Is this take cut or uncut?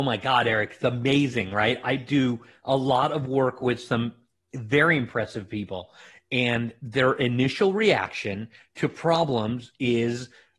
uncut